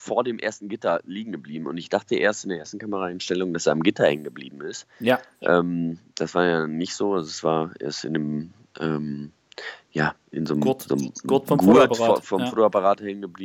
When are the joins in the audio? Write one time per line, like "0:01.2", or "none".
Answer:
0:06.1